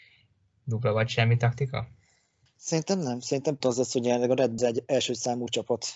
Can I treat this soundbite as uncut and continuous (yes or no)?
no